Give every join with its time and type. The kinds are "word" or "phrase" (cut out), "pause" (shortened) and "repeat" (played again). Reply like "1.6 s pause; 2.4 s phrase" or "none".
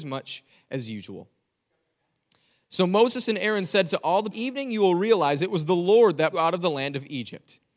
4.3 s phrase; 6.3 s phrase